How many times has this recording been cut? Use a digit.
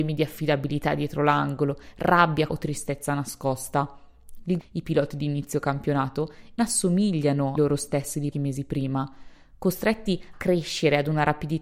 6